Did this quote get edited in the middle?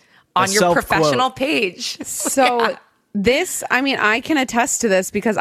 no; 0 cuts

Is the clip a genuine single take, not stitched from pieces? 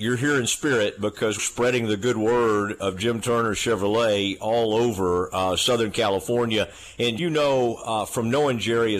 no; 2 cuts; at 1.4 s, 7.2 s

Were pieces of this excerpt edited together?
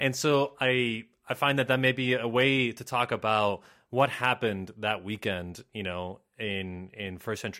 no; 0 cuts

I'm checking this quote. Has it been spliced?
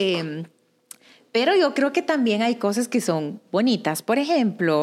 no; 0 cuts

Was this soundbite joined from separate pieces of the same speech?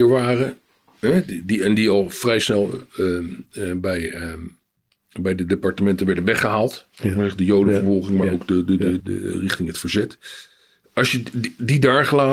yes; 1 cut; at 9.0 s

